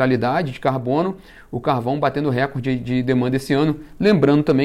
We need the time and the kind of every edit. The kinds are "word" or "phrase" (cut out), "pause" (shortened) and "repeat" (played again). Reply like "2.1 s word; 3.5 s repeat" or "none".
none